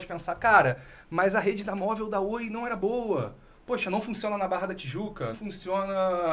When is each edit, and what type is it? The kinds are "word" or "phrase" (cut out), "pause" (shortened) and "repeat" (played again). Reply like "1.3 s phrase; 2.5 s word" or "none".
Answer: 5.3 s word

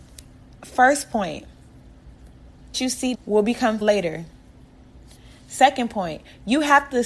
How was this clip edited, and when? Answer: 2.7 s word; 3.1 s word; 3.8 s word

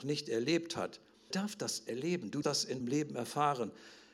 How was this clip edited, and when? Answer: 1.3 s word; 2.4 s word; 2.8 s word

